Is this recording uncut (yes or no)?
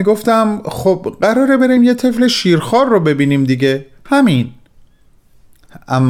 yes